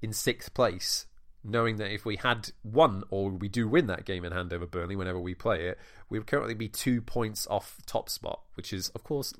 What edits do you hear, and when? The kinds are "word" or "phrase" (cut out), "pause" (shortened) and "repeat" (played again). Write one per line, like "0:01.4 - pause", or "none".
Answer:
none